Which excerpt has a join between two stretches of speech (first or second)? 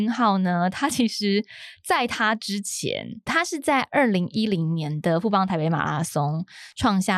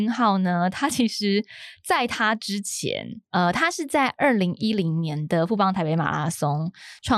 first